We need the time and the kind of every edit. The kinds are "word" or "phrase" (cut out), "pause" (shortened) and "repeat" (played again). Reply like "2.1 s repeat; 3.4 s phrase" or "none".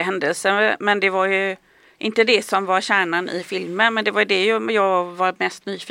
none